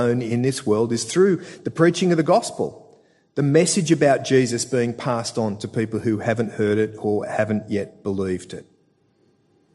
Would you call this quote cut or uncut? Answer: uncut